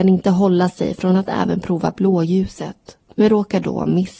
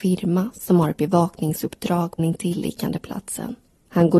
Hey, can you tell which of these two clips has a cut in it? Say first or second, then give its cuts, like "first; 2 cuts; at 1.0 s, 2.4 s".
second; 1 cut; at 2.2 s